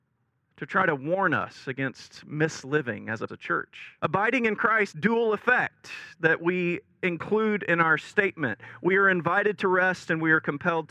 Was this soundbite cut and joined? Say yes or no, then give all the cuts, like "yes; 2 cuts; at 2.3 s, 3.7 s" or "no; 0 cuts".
yes; 3 cuts; at 3.3 s, 4.0 s, 4.9 s